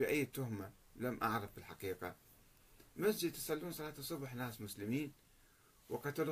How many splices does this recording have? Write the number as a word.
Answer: zero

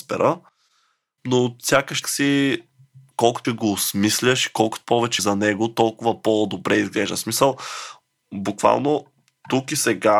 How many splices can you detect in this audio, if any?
three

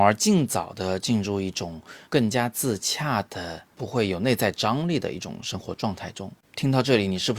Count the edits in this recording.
three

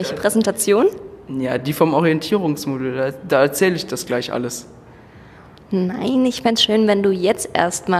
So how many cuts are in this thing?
zero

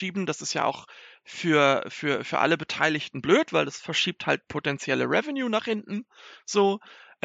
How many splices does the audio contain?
zero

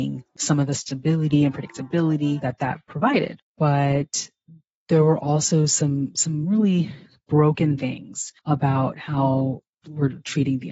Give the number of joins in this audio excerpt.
two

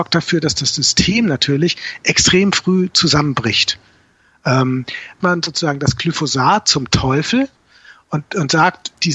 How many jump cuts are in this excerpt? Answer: one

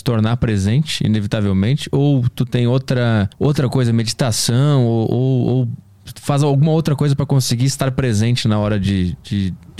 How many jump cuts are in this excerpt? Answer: one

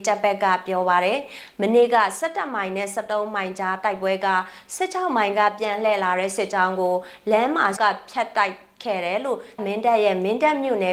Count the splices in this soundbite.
two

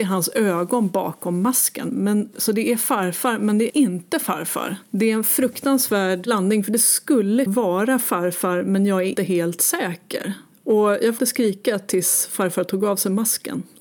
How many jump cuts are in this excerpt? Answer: four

